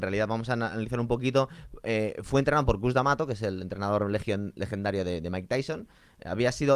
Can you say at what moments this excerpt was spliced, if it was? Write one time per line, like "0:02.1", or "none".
none